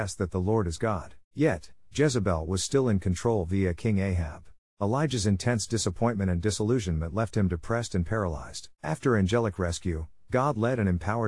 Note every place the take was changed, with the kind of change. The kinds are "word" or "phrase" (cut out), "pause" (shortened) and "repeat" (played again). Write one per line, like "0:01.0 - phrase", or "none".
0:01.2 - pause
0:04.6 - pause
0:08.7 - pause